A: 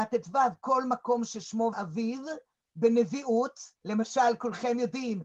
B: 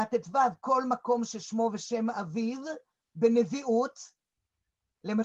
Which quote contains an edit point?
A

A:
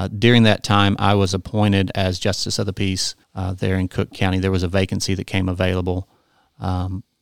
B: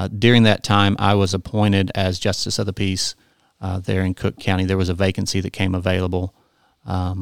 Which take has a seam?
A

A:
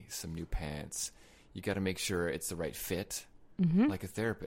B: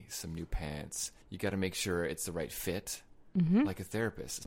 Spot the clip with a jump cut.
B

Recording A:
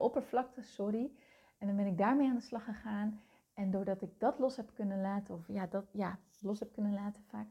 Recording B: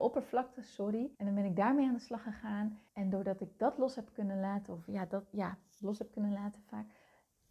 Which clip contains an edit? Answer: B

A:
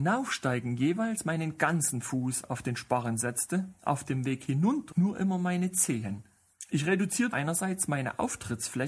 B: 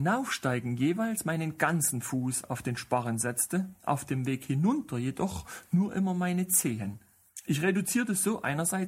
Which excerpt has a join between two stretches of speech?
A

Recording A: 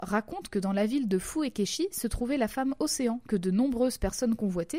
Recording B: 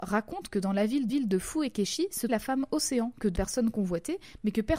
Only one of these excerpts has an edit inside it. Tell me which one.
B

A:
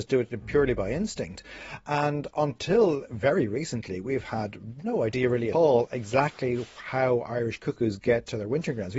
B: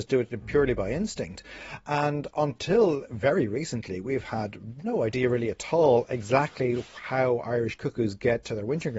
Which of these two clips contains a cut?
A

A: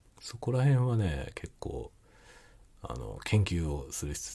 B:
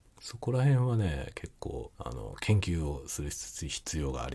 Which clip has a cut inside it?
B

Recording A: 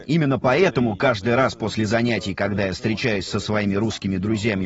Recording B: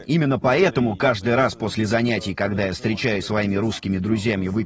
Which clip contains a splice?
B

